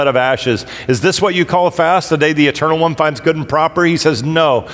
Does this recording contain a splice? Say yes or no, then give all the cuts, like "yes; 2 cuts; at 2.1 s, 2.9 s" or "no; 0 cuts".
no; 0 cuts